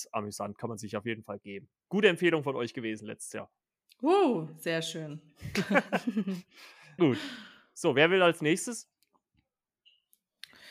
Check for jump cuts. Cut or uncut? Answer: cut